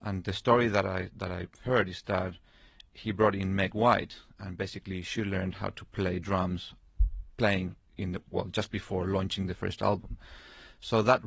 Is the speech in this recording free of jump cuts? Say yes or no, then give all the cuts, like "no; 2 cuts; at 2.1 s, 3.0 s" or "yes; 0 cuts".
yes; 0 cuts